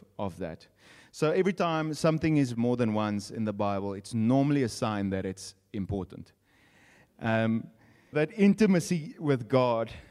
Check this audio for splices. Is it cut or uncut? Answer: cut